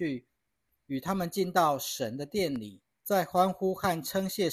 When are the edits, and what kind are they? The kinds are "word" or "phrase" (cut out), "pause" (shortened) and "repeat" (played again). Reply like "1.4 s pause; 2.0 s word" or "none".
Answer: 2.9 s pause